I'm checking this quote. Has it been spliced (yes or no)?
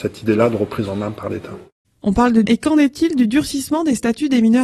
yes